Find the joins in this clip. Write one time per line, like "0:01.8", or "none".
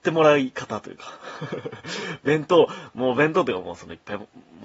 none